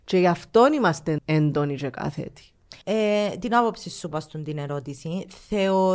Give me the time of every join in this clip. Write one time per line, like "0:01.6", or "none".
0:01.2
0:02.8
0:04.1